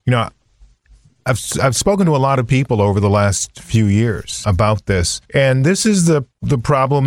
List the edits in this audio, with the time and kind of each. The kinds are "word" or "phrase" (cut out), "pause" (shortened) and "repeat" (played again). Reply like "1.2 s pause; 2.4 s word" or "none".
4.4 s word; 5.2 s pause